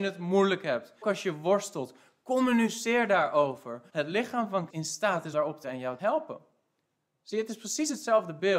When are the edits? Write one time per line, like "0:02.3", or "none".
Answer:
0:01.0
0:03.9
0:04.7
0:05.3
0:05.6
0:06.0